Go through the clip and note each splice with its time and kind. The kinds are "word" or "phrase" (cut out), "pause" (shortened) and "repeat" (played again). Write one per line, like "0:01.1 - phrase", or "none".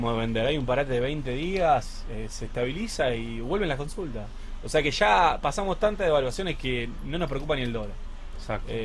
none

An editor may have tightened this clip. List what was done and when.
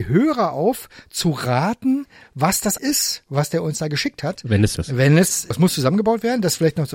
0:02.8 - word
0:04.7 - word
0:05.5 - word

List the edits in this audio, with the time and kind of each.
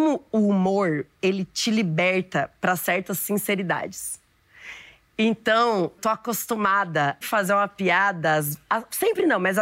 0:06.0 - word
0:07.2 - phrase

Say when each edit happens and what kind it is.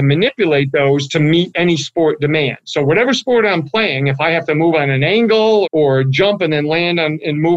0:05.6 - word

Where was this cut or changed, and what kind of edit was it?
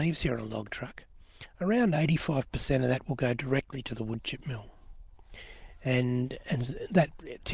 none

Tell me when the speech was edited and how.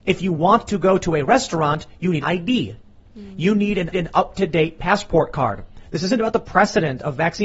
0:02.2 - word
0:03.9 - repeat

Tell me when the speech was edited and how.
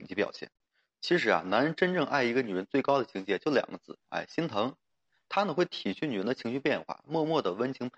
none

